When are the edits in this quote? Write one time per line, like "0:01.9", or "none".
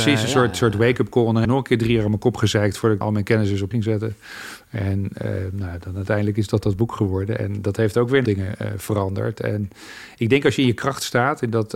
0:01.4
0:03.0
0:03.7
0:08.2